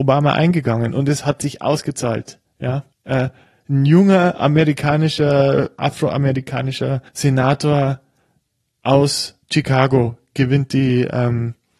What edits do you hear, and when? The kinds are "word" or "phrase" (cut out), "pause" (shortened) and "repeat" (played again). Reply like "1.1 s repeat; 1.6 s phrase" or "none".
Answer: 2.9 s pause; 7.1 s pause; 9.4 s pause